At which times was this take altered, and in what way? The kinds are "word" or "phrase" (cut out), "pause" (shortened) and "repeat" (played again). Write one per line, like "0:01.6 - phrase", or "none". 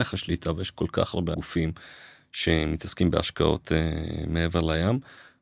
0:01.3 - word